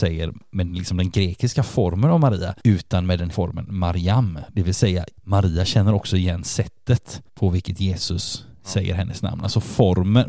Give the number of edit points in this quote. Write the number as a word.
three